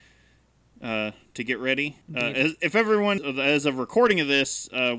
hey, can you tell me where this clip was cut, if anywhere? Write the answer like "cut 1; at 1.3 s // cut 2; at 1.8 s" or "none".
cut 1; at 2.0 s // cut 2; at 3.2 s